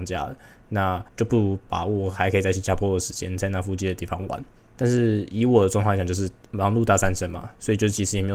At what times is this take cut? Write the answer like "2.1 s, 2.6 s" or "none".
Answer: 1.1 s, 4.6 s